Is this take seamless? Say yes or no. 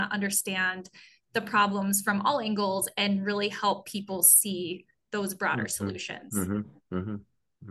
yes